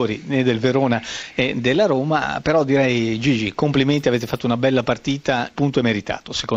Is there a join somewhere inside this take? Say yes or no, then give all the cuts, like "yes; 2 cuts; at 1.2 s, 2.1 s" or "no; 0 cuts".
yes; 1 cut; at 5.5 s